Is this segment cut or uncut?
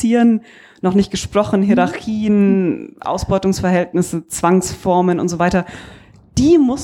uncut